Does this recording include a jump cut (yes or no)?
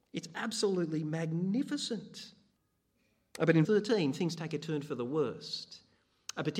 yes